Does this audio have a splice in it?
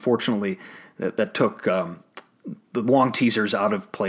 no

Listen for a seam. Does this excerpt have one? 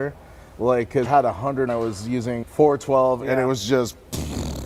yes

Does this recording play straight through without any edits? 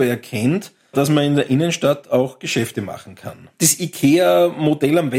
yes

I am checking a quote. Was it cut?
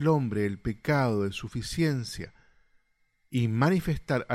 no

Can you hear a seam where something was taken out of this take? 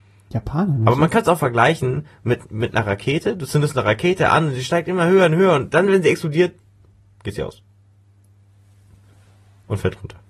no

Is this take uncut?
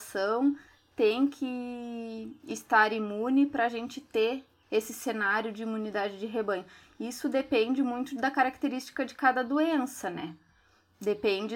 yes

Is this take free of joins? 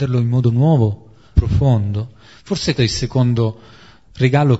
no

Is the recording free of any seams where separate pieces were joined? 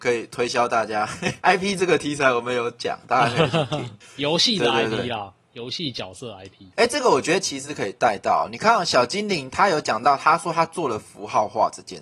yes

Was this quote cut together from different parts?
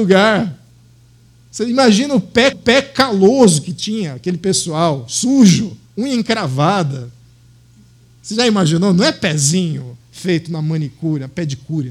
yes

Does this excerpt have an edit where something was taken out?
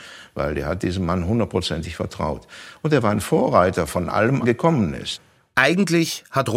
yes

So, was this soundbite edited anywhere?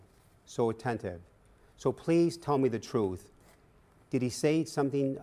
no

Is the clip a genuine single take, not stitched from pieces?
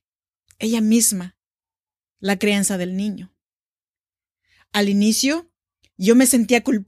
yes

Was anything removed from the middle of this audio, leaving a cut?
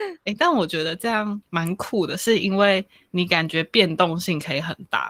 no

